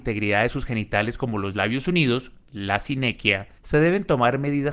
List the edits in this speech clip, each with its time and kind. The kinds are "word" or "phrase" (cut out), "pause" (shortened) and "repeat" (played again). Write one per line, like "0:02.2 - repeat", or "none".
0:02.4 - pause
0:03.6 - pause